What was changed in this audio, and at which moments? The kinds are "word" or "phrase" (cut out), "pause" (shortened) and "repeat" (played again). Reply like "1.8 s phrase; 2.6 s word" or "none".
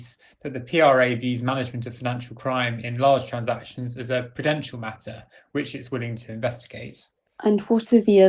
none